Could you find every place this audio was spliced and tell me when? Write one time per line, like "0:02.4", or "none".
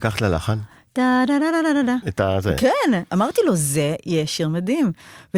none

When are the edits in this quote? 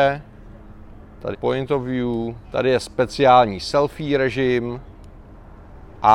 0:01.3
0:02.4

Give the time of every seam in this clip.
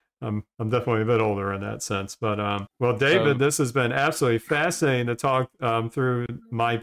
0:02.7

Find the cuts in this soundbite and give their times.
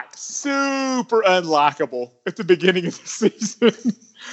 none

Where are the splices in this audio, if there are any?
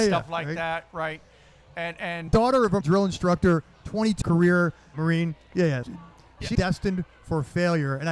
0:02.3
0:02.8
0:04.2
0:04.9
0:05.8
0:06.5

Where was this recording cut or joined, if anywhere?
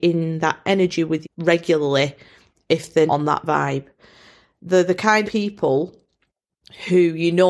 0:01.2
0:03.1
0:05.2

